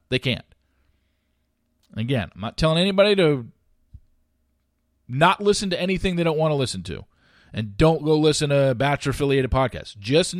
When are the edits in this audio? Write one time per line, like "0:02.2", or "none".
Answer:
none